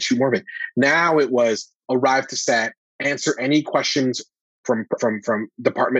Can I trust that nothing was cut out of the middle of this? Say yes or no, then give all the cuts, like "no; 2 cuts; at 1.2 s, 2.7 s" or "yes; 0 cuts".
no; 2 cuts; at 2.8 s, 5.0 s